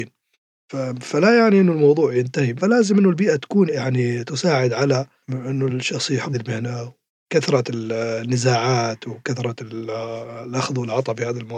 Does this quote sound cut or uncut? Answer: cut